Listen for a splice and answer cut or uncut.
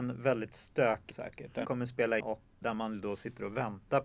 cut